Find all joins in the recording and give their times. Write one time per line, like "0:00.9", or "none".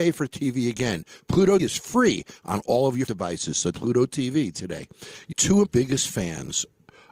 0:01.6
0:03.1
0:03.7
0:05.3
0:05.6